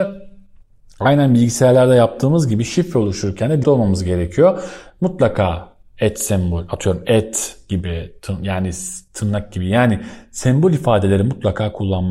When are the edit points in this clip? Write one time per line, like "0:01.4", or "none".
0:03.6